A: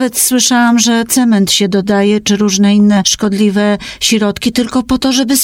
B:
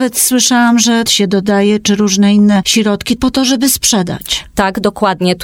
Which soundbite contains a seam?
B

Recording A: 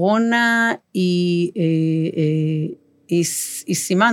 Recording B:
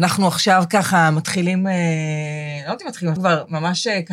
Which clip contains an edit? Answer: B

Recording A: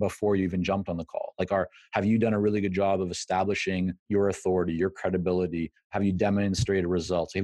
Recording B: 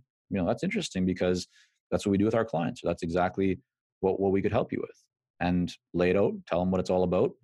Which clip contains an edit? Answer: A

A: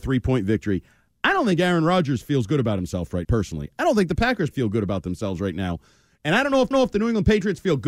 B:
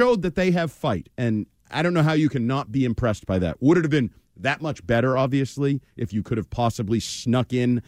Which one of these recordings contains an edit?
A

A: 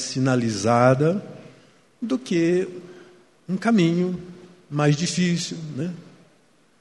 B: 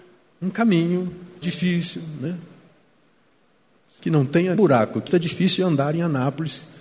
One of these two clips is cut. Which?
B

